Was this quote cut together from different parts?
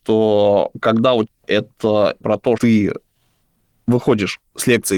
yes; 3 cuts; at 1.3 s, 2.2 s, 2.6 s

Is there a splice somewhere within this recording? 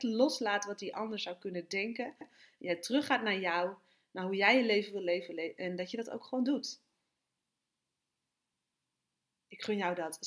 yes; 1 cut; at 2.2 s

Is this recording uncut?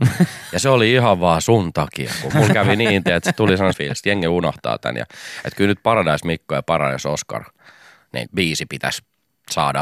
no; 3 cuts; at 2.3 s, 3.7 s, 8.3 s

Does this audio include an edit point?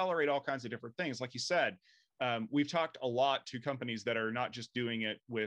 no; 0 cuts

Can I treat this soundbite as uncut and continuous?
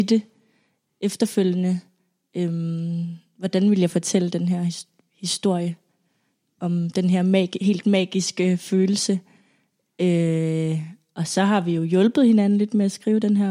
yes; 0 cuts

